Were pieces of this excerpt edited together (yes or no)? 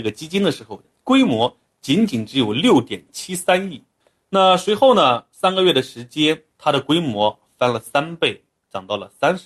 no